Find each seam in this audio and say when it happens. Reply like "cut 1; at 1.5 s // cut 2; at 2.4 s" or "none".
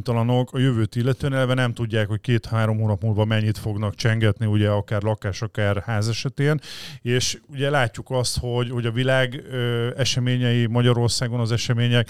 none